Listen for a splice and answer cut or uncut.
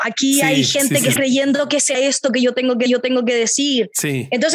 cut